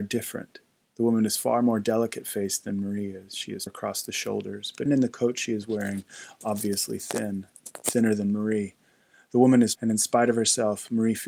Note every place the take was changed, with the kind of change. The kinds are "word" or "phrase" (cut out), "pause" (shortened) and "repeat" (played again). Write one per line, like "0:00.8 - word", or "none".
0:03.7 - phrase
0:04.9 - word
0:09.7 - word